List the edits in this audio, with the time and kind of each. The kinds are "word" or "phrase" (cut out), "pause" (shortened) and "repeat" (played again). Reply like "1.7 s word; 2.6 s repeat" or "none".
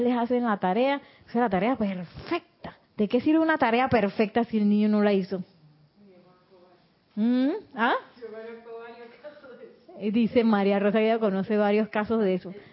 2.8 s pause